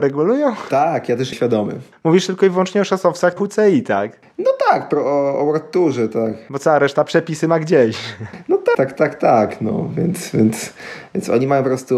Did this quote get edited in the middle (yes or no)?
yes